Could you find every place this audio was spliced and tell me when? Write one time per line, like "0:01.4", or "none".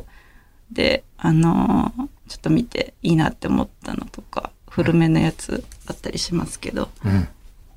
0:01.1